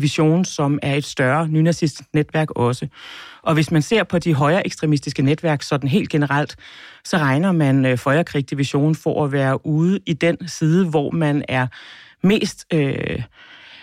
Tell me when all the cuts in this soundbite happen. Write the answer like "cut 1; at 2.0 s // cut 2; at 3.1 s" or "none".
none